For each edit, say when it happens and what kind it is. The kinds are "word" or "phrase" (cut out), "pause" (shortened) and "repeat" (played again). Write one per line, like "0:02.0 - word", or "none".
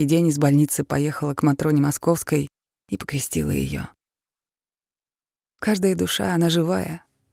none